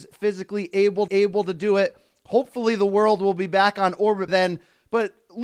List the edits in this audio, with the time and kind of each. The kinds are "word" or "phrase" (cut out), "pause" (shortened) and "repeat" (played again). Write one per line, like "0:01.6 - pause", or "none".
0:01.1 - repeat
0:04.3 - word